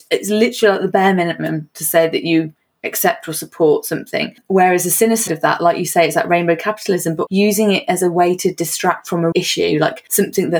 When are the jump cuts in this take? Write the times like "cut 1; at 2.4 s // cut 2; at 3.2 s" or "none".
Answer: cut 1; at 5.3 s // cut 2; at 7.3 s // cut 3; at 9.3 s